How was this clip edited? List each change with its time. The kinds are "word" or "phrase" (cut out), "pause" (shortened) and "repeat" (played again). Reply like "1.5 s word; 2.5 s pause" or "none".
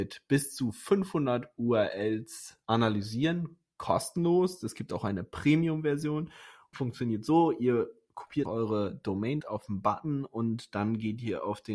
2.6 s pause; 6.7 s phrase; 8.4 s word; 9.4 s phrase